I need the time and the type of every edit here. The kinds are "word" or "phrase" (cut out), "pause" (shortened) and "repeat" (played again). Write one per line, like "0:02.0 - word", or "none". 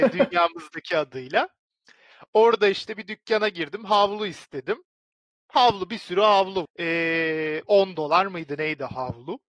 0:06.6 - word